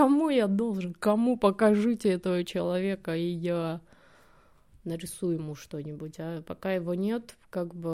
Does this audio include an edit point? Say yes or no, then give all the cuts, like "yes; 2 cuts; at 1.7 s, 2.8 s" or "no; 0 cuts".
no; 0 cuts